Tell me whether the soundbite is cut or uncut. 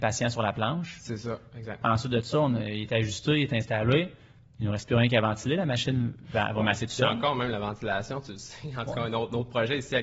uncut